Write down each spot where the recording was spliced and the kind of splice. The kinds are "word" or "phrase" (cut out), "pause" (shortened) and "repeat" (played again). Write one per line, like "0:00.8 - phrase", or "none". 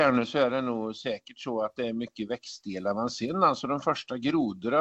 none